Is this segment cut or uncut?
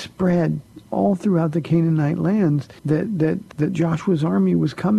cut